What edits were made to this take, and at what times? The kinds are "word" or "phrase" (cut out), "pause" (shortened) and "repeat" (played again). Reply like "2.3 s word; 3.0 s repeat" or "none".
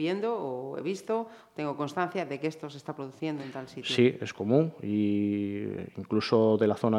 none